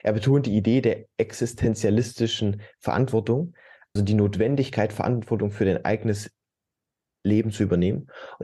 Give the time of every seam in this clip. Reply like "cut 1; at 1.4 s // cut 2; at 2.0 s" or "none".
cut 1; at 4.0 s